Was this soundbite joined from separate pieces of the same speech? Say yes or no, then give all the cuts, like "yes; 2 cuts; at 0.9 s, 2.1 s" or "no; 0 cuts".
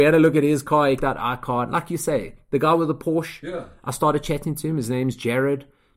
yes; 1 cut; at 1.0 s